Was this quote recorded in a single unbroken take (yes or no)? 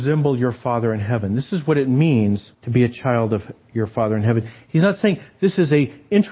no